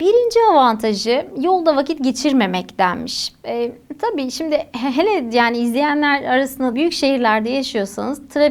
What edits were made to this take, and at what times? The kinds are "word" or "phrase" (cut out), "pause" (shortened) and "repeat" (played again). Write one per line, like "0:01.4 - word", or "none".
0:06.7 - word